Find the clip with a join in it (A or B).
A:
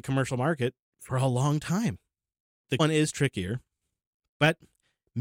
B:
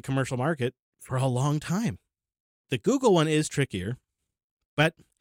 A